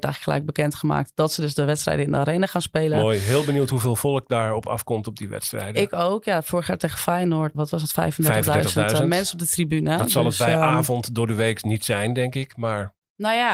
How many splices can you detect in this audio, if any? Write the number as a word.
one